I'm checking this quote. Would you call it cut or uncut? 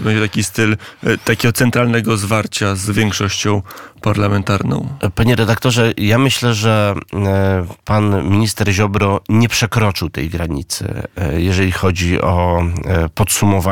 uncut